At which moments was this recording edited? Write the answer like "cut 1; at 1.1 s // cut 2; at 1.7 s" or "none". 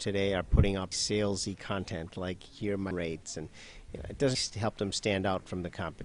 cut 1; at 0.9 s // cut 2; at 2.9 s // cut 3; at 4.3 s